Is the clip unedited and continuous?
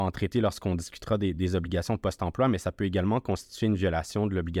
yes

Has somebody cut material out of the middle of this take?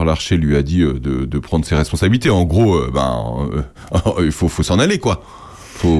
no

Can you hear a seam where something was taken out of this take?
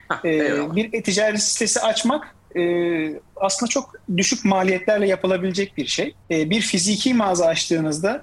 yes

